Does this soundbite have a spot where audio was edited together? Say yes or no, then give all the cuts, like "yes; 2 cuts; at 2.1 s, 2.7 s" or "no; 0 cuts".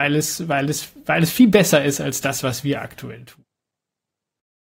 no; 0 cuts